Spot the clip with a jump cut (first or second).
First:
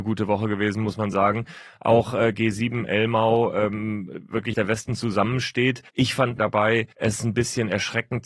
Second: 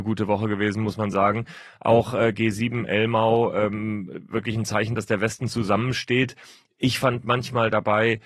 first